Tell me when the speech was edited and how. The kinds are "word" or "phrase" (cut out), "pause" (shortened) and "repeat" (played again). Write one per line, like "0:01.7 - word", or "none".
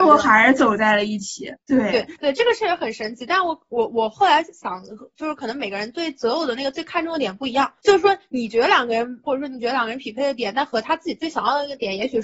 0:01.6 - pause
0:02.2 - pause
0:07.8 - pause
0:09.2 - word